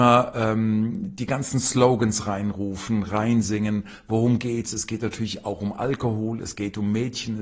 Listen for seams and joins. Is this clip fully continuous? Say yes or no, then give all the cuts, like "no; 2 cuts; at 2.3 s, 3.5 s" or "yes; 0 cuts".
yes; 0 cuts